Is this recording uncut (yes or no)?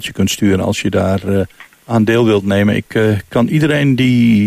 yes